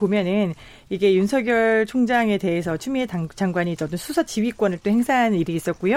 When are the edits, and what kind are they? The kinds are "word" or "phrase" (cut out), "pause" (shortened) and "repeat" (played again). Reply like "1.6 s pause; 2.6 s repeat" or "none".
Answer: none